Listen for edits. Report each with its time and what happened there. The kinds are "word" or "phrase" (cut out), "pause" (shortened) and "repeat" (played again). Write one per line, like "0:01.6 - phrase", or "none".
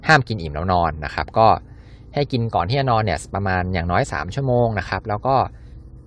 none